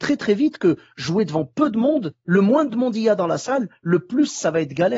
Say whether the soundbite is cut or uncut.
uncut